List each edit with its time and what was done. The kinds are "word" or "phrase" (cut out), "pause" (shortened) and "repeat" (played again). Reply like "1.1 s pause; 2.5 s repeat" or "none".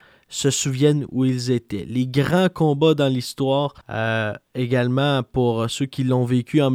3.8 s pause